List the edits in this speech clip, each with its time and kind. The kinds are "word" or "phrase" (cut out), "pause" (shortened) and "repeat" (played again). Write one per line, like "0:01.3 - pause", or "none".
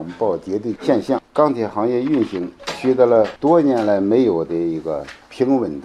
0:01.3 - pause